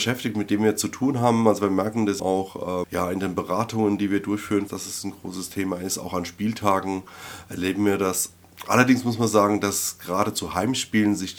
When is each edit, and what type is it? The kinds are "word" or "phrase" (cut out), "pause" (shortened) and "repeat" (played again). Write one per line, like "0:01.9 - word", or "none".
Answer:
0:02.2 - word
0:02.8 - word
0:04.7 - phrase